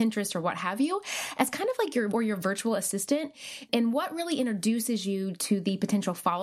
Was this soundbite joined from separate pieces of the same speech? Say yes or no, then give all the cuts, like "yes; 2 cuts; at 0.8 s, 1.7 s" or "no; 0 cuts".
yes; 1 cut; at 2.1 s